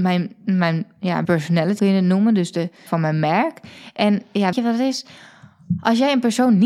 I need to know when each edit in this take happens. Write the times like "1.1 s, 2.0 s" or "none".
1.2 s, 1.8 s, 2.9 s, 4.5 s